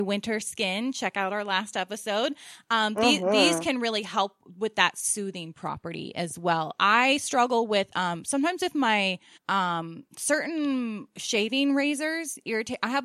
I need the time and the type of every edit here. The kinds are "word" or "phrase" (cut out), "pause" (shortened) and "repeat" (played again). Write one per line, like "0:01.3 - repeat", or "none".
0:09.4 - pause